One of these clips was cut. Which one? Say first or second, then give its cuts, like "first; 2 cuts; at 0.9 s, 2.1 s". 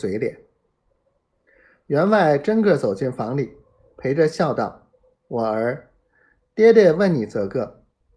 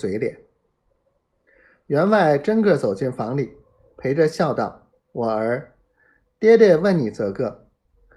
second; 1 cut; at 4.9 s